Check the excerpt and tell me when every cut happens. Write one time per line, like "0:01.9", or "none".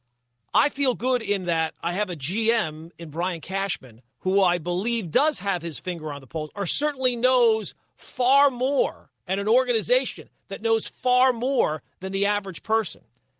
0:04.1
0:09.2

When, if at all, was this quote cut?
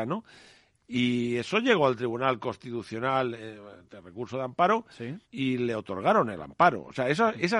0:05.2

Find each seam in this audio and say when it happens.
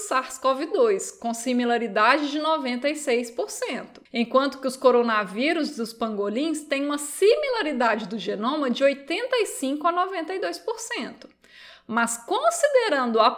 none

